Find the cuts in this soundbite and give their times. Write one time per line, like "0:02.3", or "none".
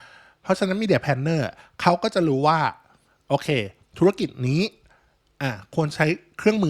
none